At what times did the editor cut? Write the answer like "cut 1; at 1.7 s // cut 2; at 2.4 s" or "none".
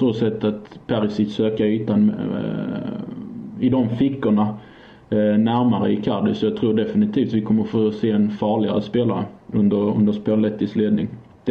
none